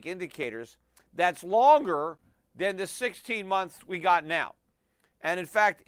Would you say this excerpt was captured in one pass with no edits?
yes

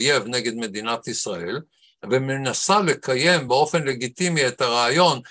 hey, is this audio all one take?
yes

